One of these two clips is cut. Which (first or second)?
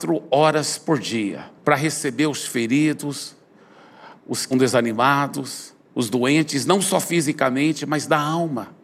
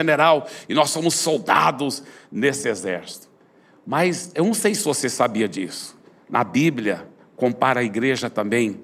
first